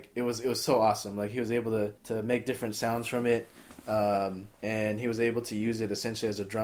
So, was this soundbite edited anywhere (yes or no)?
yes